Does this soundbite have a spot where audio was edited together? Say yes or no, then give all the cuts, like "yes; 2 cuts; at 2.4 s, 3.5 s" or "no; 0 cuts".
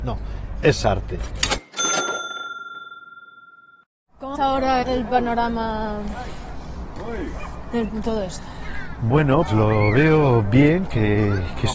yes; 4 cuts; at 4.4 s, 4.8 s, 7.9 s, 9.5 s